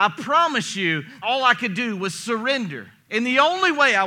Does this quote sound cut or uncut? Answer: cut